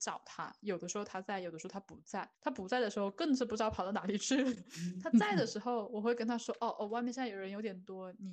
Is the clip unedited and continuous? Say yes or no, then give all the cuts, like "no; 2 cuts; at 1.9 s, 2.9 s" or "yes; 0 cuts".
no; 1 cut; at 2.3 s